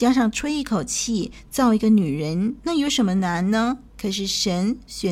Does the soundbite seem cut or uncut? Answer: cut